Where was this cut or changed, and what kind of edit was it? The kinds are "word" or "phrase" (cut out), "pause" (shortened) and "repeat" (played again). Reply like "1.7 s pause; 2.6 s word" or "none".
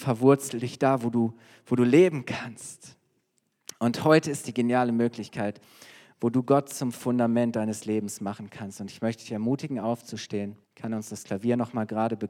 10.6 s pause